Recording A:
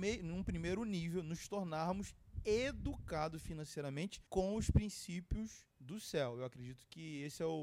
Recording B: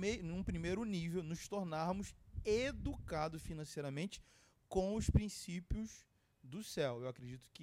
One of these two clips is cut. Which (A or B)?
A